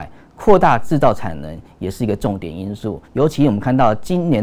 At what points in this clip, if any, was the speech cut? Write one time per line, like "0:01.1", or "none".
0:03.0